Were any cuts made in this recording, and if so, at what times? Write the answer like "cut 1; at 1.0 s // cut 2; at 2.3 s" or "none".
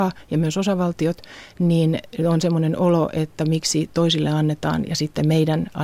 none